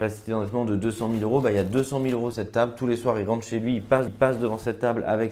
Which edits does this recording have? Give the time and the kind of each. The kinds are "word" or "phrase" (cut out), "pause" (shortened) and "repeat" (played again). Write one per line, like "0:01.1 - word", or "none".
0:02.3 - word
0:04.1 - repeat